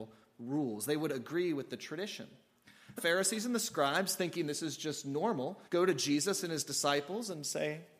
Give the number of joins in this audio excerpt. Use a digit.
2